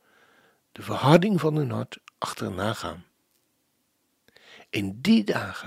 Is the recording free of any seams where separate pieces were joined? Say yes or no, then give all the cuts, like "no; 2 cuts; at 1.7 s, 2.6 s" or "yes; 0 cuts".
yes; 0 cuts